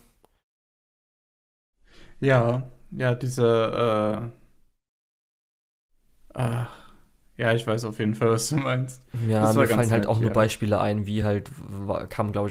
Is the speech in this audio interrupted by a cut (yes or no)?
no